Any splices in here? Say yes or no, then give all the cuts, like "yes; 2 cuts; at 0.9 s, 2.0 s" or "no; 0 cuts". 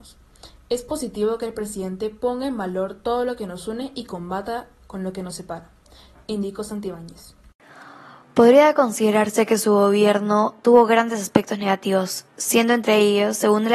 yes; 1 cut; at 12.3 s